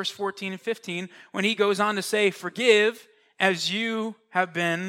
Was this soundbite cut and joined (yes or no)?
no